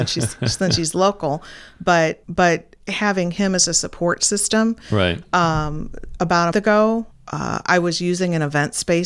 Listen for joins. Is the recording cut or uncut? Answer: cut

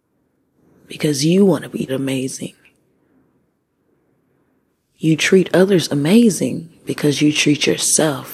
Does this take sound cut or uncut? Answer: cut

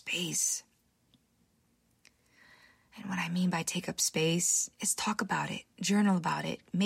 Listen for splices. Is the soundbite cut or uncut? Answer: cut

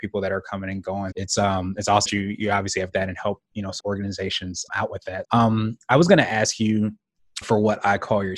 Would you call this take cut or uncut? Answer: cut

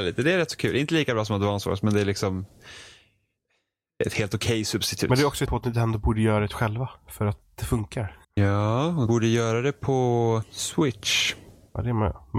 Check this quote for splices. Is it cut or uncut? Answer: cut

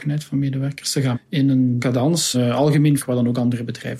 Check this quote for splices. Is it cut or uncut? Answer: cut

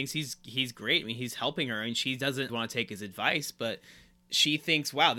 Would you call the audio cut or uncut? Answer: cut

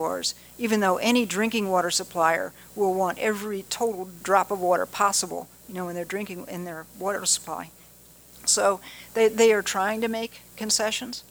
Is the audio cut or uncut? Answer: uncut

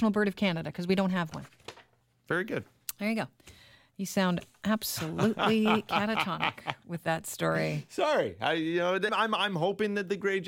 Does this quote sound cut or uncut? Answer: cut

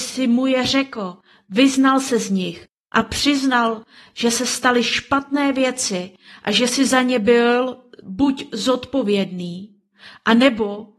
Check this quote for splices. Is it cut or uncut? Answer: uncut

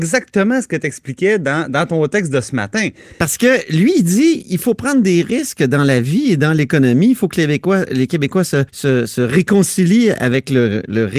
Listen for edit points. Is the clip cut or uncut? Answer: cut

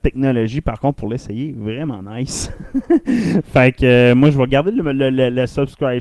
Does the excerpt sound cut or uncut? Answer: uncut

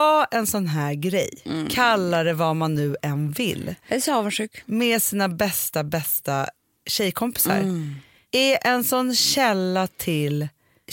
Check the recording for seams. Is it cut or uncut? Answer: uncut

